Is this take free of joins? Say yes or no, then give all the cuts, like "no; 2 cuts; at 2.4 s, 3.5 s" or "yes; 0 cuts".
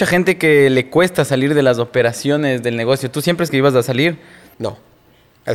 no; 1 cut; at 3.5 s